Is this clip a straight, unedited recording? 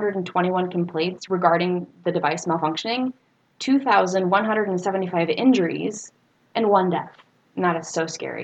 yes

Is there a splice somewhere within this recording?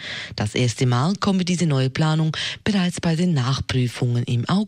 no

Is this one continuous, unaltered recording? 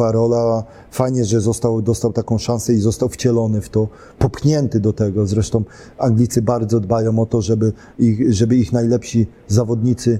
yes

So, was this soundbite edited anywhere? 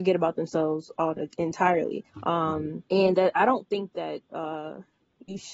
yes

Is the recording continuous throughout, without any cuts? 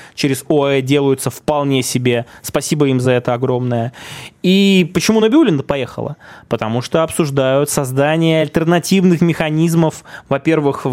yes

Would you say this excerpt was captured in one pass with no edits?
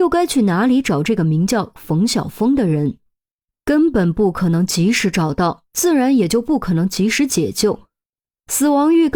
no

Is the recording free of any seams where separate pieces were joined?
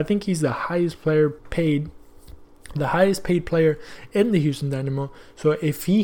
no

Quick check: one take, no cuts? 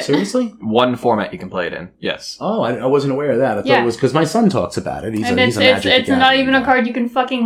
no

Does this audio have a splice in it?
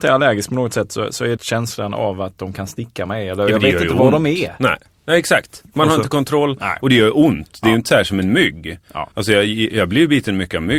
yes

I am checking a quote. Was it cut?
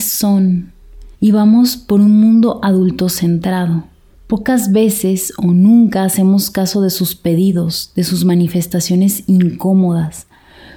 yes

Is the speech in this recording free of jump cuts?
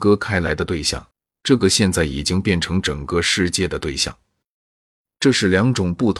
yes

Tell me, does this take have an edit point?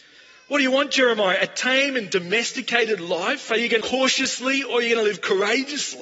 yes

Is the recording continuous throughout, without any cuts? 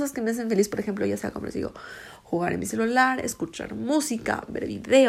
yes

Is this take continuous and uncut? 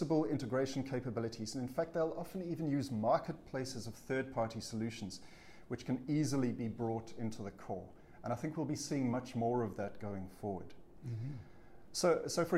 yes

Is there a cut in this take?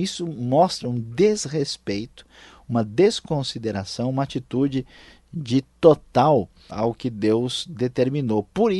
yes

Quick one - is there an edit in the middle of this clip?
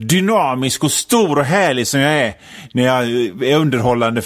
no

